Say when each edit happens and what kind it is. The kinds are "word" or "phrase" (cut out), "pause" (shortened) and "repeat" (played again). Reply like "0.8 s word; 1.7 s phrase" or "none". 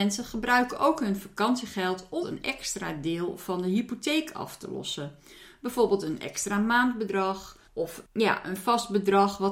2.2 s word; 7.7 s pause